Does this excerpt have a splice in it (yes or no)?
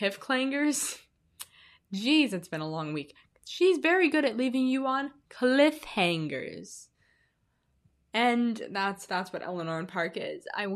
no